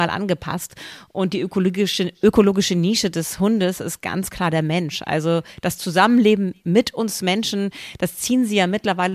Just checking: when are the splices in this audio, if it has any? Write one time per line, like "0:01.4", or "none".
none